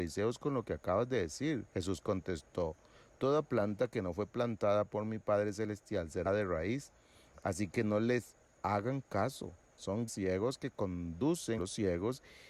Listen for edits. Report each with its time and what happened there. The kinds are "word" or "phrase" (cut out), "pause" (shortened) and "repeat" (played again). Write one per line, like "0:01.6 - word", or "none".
0:01.7 - pause
0:06.3 - word
0:10.1 - word
0:11.6 - word